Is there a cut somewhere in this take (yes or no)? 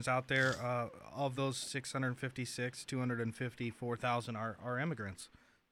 no